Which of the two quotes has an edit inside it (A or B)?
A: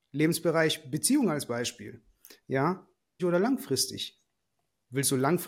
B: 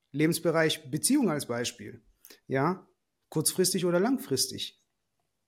A